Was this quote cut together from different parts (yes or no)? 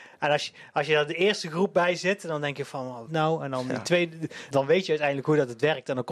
yes